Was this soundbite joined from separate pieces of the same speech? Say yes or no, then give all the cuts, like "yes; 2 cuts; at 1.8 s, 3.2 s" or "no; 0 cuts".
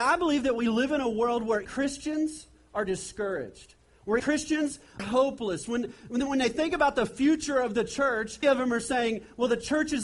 yes; 4 cuts; at 1.6 s, 4.2 s, 5.0 s, 8.4 s